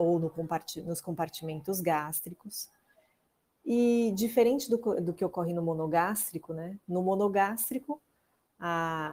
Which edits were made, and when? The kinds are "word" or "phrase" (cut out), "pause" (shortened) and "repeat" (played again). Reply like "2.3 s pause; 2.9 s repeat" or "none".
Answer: none

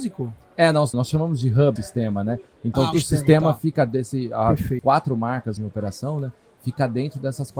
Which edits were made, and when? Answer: 0.9 s word; 1.8 s word; 2.9 s word; 3.9 s word; 4.8 s word; 5.6 s word

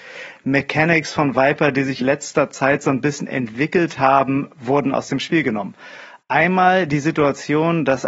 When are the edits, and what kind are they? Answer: 2.0 s word

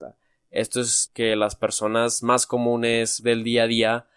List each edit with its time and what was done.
1.1 s word; 3.2 s word

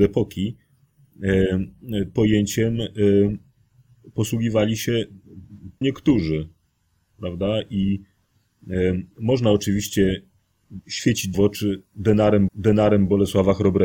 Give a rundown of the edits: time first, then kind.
2.2 s word; 5.8 s word; 9.1 s pause; 11.3 s word; 12.5 s repeat

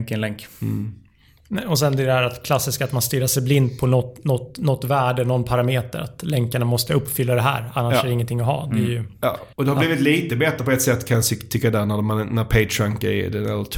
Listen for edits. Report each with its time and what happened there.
9.5 s pause

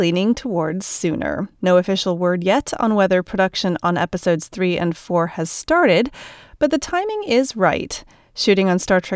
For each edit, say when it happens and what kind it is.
1.5 s pause

